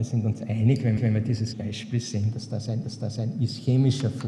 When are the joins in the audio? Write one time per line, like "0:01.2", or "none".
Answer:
0:01.0
0:01.5
0:02.8